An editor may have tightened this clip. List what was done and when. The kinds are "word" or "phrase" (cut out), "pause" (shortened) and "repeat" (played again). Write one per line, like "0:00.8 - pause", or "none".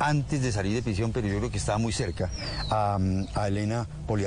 none

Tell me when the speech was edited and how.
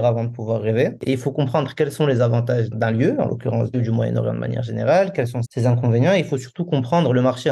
0:02.7 - word
0:03.7 - word
0:05.4 - word

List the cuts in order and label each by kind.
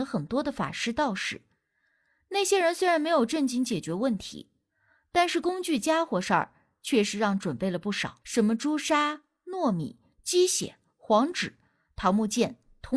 0:08.2 - pause

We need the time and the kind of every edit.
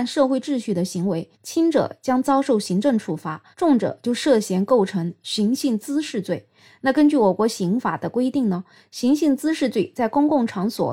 0:01.3 - pause
0:03.5 - pause

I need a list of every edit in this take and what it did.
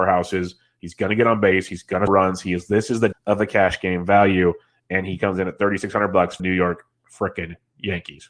0:02.1 - word
0:03.1 - word
0:06.4 - word

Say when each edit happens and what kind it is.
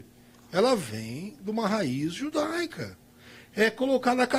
none

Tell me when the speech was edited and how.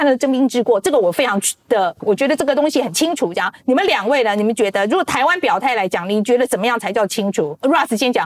0:02.0 - word
0:03.6 - pause

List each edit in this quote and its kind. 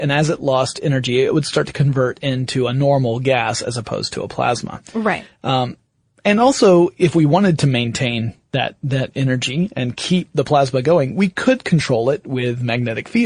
none

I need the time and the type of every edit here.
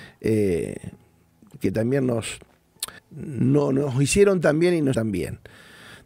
0:03.0 - pause
0:04.9 - word

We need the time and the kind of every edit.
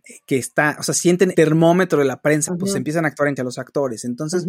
0:01.3 - word
0:02.5 - word
0:03.4 - word

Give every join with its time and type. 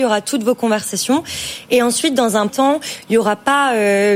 0:02.5 - word

